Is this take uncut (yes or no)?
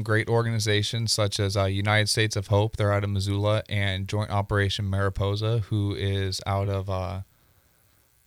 yes